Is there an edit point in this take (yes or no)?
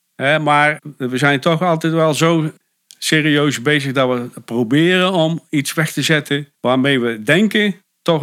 no